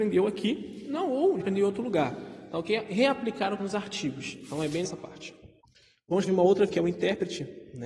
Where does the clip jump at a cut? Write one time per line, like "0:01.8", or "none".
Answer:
0:01.4
0:03.6
0:04.8
0:06.3
0:06.7